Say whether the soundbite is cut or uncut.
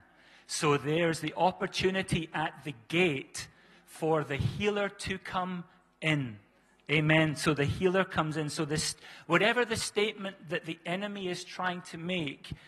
uncut